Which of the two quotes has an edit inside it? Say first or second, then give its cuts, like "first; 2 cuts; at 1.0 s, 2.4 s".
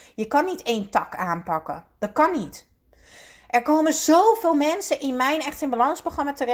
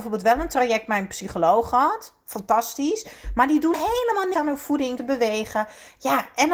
second; 3 cuts; at 3.7 s, 4.3 s, 5.0 s